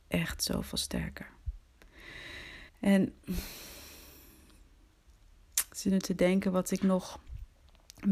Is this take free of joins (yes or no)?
no